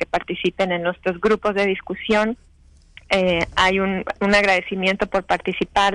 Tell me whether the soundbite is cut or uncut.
uncut